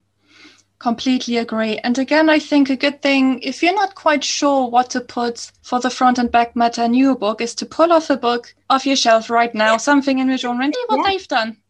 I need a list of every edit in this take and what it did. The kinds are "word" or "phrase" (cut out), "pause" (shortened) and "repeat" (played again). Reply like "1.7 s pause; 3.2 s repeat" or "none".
5.6 s pause; 8.6 s pause; 10.7 s word